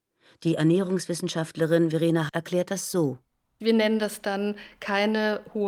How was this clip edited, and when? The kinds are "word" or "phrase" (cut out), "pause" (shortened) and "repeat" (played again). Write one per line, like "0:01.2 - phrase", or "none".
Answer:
0:02.3 - word